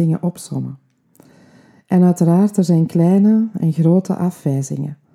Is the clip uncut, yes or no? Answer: yes